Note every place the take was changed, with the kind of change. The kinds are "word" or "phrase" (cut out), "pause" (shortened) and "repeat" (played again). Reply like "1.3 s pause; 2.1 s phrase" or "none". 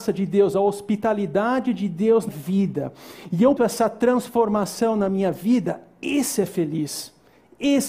2.3 s word; 3.6 s word

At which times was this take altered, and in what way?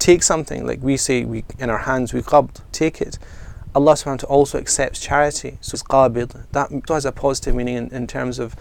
2.7 s word; 5.7 s phrase; 6.9 s word

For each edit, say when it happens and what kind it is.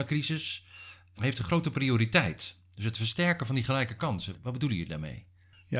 none

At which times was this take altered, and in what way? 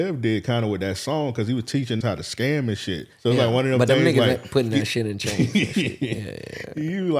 2.0 s word; 3.1 s pause

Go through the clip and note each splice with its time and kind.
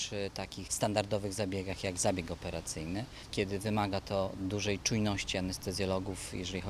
none

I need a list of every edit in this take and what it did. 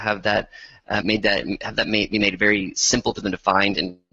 1.0 s word

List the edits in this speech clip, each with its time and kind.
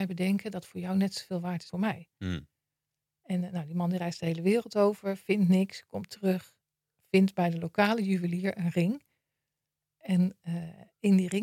1.7 s word

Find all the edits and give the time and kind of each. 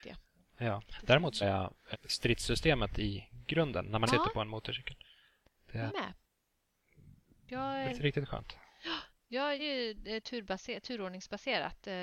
1.4 s word; 1.9 s word; 4.1 s word; 5.9 s word; 7.9 s word; 9.6 s word

